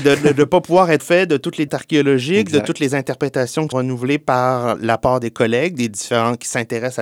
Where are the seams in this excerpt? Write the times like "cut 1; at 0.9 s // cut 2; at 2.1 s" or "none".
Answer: cut 1; at 1.0 s // cut 2; at 1.7 s // cut 3; at 3.7 s